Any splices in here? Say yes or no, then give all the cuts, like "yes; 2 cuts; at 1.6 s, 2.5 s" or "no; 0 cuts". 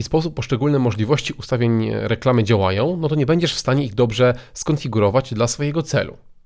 no; 0 cuts